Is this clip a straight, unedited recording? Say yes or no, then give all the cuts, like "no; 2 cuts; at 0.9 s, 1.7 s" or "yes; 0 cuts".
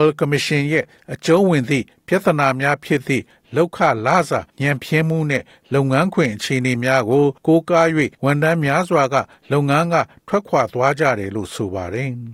no; 3 cuts; at 4.5 s, 7.4 s, 8.1 s